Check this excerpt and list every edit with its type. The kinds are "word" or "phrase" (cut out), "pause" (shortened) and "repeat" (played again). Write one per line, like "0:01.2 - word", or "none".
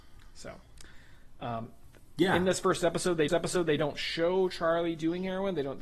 0:03.3 - repeat